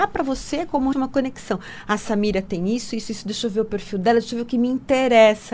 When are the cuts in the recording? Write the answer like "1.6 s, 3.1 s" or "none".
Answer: 0.9 s